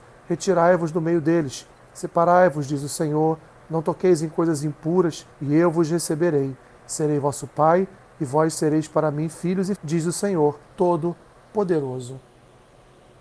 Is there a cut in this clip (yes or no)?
yes